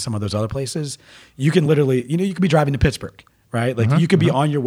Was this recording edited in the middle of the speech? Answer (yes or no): no